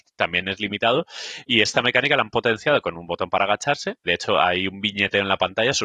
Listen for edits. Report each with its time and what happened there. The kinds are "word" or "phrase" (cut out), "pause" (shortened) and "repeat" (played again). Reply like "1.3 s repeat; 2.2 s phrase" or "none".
4.0 s word